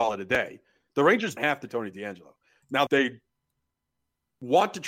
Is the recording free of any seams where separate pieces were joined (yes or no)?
no